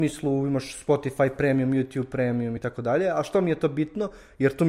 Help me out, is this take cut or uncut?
uncut